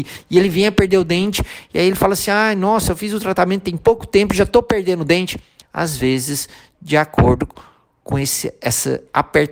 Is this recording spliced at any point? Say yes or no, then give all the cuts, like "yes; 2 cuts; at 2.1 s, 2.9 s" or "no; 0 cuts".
no; 0 cuts